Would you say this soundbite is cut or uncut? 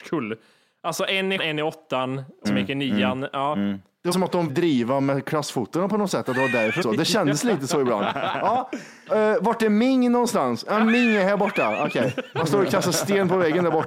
cut